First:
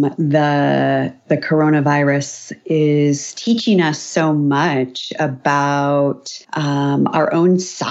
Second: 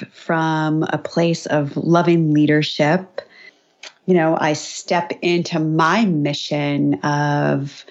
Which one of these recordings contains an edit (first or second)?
first